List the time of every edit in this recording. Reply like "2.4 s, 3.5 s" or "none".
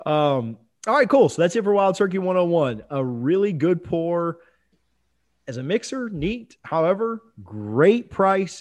none